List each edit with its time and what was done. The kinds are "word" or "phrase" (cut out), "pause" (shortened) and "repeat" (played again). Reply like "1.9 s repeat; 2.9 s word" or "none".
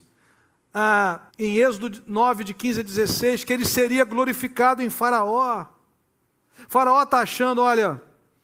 1.3 s pause